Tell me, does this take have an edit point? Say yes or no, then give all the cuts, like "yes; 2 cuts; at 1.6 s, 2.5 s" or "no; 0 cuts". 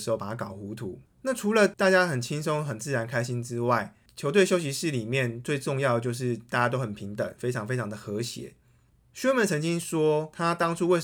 no; 0 cuts